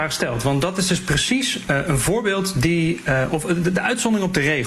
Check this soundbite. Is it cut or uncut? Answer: cut